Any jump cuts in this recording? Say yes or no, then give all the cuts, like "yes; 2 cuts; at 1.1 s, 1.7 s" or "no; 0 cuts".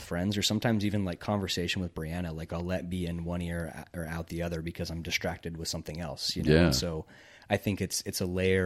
no; 0 cuts